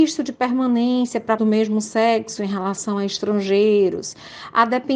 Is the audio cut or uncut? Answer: cut